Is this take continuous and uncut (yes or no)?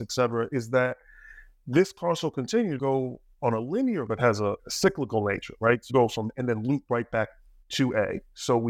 no